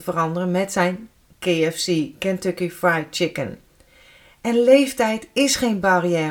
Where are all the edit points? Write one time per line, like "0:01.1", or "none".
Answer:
none